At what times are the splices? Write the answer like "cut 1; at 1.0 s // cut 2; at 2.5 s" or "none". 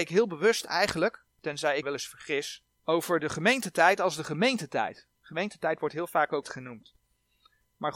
cut 1; at 1.3 s // cut 2; at 1.8 s // cut 3; at 2.7 s // cut 4; at 5.1 s // cut 5; at 6.4 s